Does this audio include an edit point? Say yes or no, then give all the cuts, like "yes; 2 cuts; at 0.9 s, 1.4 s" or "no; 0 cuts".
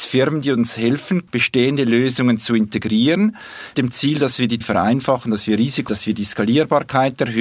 yes; 4 cuts; at 1.3 s, 3.7 s, 4.6 s, 5.9 s